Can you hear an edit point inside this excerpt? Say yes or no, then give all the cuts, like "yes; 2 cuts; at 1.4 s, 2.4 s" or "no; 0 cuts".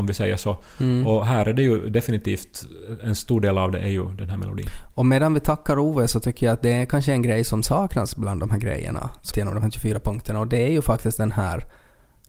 yes; 1 cut; at 9.3 s